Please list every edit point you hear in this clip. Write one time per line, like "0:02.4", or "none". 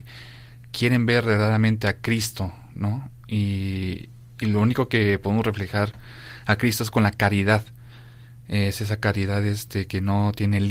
none

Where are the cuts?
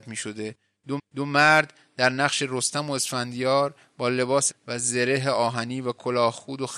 0:01.0
0:04.5

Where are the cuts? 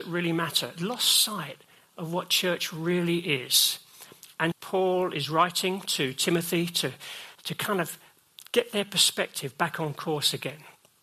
0:04.5
0:07.3

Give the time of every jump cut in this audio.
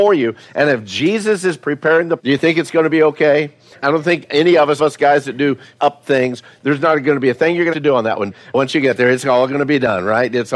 0:02.2
0:04.8
0:05.8
0:07.7

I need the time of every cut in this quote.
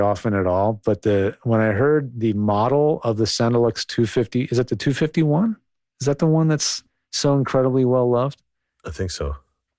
none

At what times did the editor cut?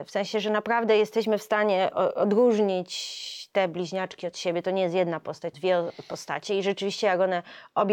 0:05.5

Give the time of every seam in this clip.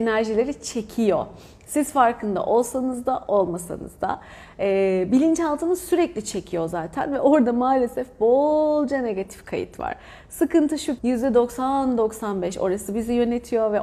0:11.0

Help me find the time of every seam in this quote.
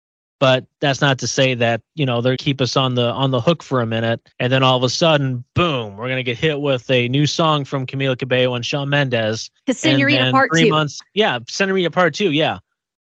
0:02.4
0:04.3
0:09.6
0:11.1

